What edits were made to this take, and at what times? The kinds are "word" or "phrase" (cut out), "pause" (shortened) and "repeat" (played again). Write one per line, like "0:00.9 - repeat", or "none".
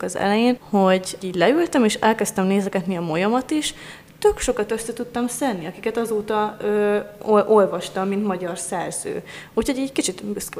0:01.2 - word